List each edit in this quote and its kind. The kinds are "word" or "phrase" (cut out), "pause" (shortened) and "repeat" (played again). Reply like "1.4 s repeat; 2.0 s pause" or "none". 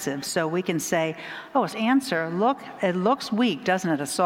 1.7 s word